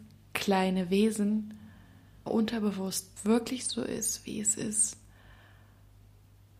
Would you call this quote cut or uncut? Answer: cut